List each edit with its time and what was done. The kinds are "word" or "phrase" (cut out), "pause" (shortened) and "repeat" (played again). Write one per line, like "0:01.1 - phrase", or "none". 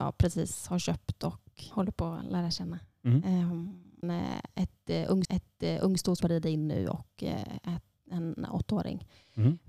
0:01.7 - word
0:04.0 - word
0:05.2 - repeat
0:06.2 - phrase